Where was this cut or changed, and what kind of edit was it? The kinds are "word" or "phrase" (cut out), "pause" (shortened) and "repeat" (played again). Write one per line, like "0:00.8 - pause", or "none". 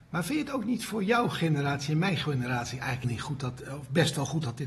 0:03.0 - word